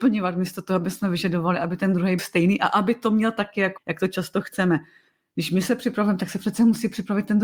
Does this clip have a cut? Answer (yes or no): yes